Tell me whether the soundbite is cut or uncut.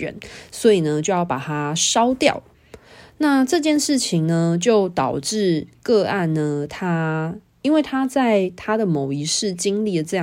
uncut